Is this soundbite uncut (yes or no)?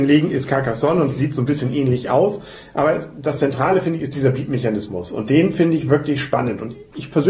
yes